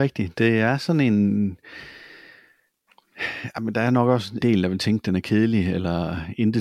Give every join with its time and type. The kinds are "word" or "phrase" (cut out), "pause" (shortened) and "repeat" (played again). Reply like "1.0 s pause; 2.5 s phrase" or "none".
4.4 s word